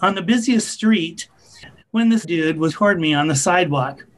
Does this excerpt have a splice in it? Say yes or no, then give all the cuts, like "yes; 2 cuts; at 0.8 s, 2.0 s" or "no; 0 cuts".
yes; 2 cuts; at 2.2 s, 2.7 s